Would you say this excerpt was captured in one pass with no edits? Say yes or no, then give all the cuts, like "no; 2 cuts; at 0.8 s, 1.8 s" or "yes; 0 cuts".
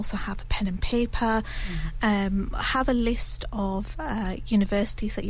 yes; 0 cuts